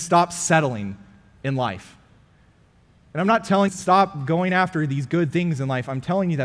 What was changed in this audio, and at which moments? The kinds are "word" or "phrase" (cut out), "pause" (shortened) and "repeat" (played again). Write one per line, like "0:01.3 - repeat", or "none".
0:03.7 - phrase